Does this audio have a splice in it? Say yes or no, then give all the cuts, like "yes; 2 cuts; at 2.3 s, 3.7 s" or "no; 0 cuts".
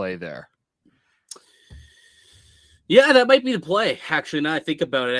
no; 0 cuts